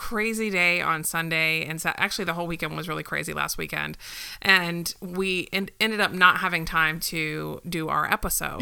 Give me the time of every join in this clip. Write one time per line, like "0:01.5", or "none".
none